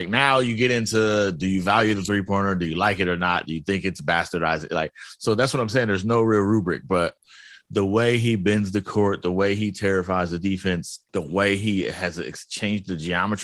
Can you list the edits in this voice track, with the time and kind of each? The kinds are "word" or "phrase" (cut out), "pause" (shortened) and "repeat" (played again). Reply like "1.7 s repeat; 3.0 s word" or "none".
11.1 s pause